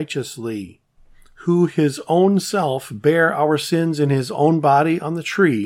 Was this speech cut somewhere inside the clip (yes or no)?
no